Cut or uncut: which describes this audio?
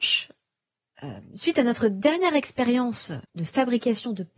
cut